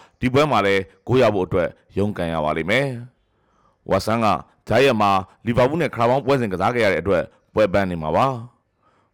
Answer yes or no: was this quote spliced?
no